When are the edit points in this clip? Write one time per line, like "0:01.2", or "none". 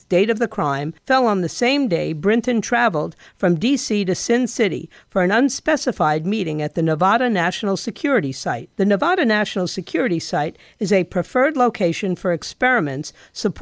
0:01.0
0:08.7